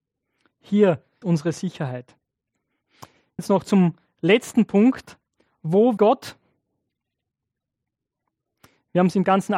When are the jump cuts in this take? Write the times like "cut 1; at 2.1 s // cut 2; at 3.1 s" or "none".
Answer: cut 1; at 1.2 s // cut 2; at 3.4 s // cut 3; at 6.0 s